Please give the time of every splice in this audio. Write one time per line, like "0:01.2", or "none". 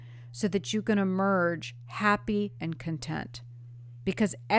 0:02.6